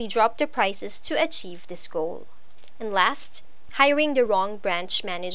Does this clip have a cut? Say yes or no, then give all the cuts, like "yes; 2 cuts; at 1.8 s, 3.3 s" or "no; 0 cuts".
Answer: no; 0 cuts